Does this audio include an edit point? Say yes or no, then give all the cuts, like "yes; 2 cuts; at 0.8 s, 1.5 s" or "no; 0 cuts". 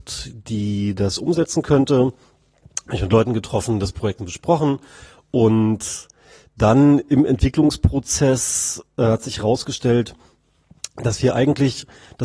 yes; 1 cut; at 4.2 s